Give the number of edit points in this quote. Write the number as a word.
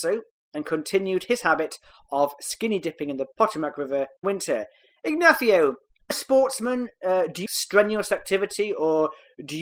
three